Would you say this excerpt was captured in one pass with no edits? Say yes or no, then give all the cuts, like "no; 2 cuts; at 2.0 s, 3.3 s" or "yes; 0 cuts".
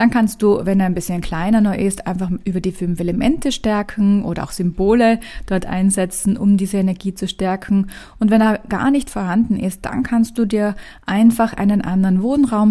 yes; 0 cuts